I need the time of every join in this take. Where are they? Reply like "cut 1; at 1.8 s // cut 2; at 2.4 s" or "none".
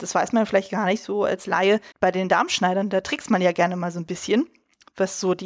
cut 1; at 1.9 s